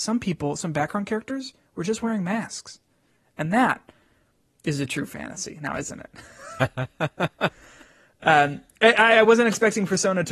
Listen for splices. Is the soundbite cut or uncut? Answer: uncut